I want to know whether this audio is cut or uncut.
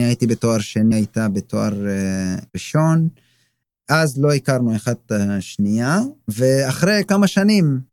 cut